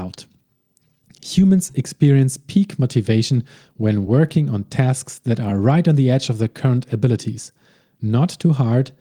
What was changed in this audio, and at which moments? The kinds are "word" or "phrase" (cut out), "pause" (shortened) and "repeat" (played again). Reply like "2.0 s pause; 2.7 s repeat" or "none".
none